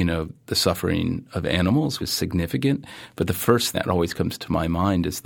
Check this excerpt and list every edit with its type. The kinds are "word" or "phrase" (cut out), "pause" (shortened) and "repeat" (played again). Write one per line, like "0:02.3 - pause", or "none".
0:02.0 - word
0:03.7 - word